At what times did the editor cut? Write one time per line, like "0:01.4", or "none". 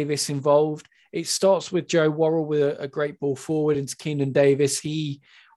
none